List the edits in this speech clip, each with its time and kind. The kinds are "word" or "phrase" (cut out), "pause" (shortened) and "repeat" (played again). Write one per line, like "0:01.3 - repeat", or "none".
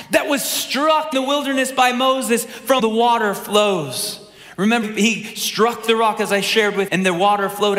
0:01.1 - word
0:02.8 - word
0:04.8 - word
0:06.9 - word